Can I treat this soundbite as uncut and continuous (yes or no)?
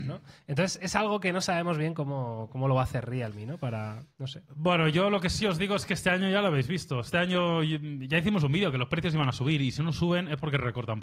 yes